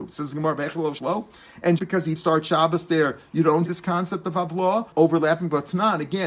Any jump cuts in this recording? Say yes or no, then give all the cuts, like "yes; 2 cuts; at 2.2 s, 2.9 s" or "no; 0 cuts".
yes; 5 cuts; at 1.0 s, 1.8 s, 2.2 s, 3.7 s, 4.9 s